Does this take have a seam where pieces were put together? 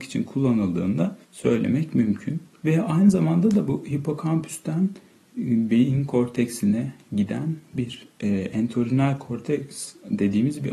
yes; 2 cuts; at 1.2 s, 2.5 s

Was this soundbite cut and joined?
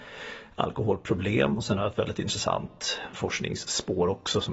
no; 0 cuts

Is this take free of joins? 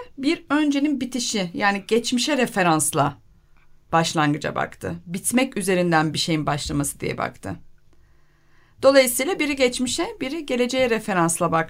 yes; 0 cuts

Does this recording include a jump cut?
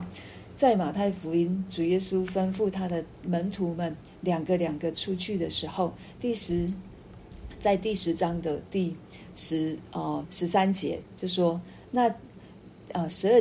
yes; 1 cut; at 10.2 s

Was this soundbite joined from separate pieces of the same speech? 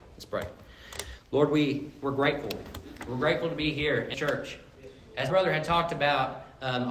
yes; 2 cuts; at 4.1 s, 5.3 s

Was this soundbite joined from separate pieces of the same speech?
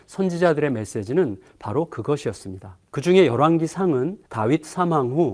yes; 2 cuts; at 2.9 s, 4.2 s

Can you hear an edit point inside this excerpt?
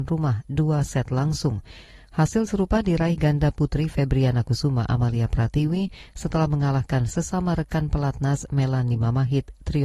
no; 0 cuts

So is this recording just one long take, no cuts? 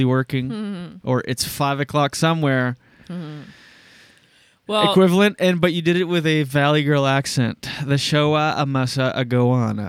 yes; 0 cuts

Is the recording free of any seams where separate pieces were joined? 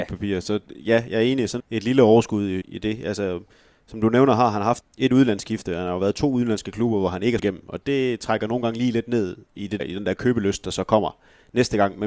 no; 6 cuts; at 1.6 s, 2.6 s, 4.8 s, 7.4 s, 7.8 s, 9.8 s

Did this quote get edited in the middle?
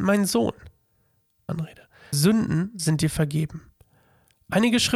yes; 2 cuts; at 1.5 s, 2.1 s

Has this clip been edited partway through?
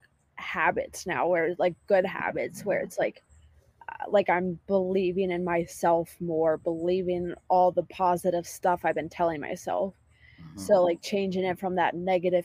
no; 0 cuts

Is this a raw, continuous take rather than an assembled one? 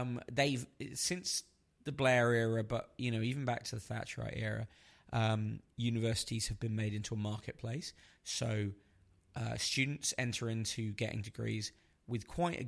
yes; 0 cuts

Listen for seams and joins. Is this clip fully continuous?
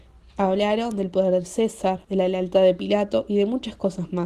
no; 1 cut; at 2.0 s

